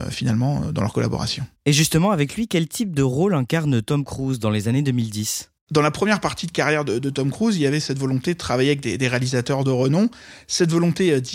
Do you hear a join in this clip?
no; 0 cuts

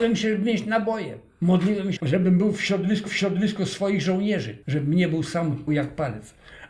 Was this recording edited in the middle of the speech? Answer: yes; 4 cuts; at 2.0 s, 3.1 s, 4.6 s, 5.7 s

